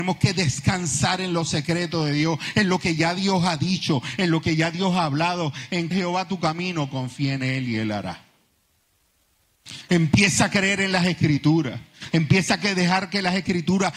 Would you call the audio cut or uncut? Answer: cut